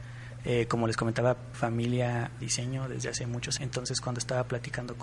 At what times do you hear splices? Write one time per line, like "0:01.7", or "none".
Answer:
0:01.5
0:02.4
0:03.6